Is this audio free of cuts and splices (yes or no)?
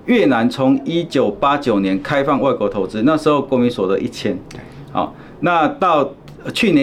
yes